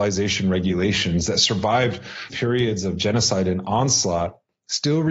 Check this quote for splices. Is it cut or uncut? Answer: cut